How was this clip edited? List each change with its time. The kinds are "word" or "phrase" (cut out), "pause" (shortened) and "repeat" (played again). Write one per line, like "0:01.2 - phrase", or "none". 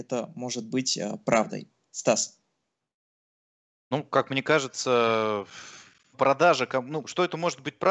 0:06.1 - word